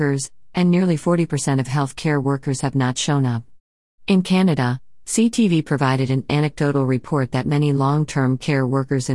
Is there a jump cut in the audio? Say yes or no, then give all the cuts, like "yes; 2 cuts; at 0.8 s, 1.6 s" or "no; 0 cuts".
no; 0 cuts